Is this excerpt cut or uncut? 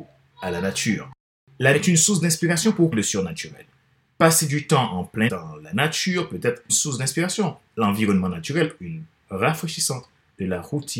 cut